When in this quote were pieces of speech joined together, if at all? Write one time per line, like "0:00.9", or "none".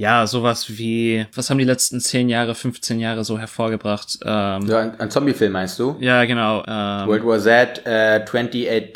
none